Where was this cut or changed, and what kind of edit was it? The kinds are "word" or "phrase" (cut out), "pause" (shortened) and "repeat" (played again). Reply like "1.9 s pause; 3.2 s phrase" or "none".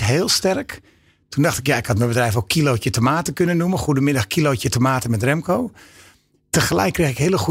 none